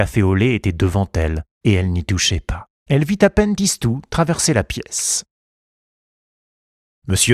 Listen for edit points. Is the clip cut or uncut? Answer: cut